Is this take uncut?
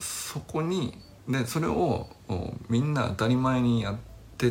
no; 1 cut; at 1.2 s

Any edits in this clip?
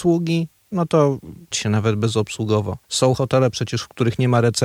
yes; 2 cuts; at 1.5 s, 2.8 s

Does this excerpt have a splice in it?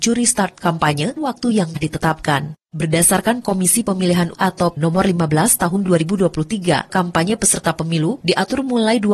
yes; 6 cuts; at 1.2 s, 1.8 s, 3.4 s, 4.3 s, 4.8 s, 6.9 s

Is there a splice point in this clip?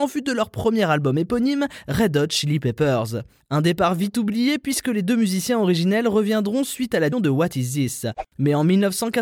yes; 1 cut; at 7.1 s

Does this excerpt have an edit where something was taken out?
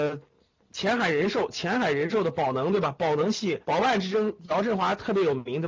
yes; 1 cut; at 3.6 s

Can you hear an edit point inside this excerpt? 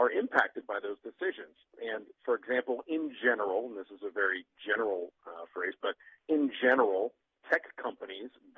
no; 0 cuts

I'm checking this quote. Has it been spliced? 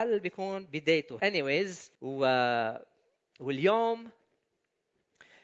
yes; 2 cuts; at 1.2 s, 1.9 s

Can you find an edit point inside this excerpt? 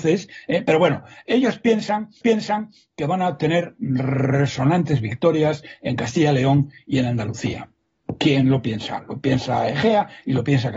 yes; 1 cut; at 2.2 s

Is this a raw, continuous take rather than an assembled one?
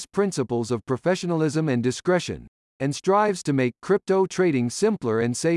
yes; 0 cuts

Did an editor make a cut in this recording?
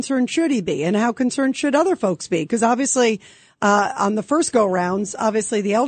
no; 0 cuts

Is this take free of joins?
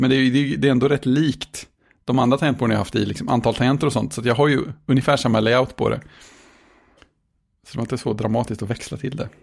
yes; 0 cuts

